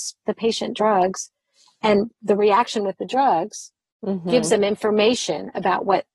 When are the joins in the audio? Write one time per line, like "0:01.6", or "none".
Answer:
none